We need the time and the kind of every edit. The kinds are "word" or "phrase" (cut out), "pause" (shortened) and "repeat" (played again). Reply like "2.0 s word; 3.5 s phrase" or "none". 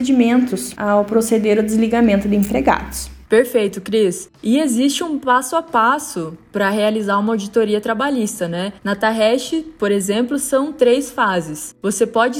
8.8 s pause